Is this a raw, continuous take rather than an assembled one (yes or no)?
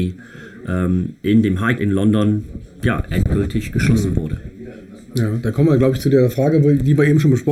no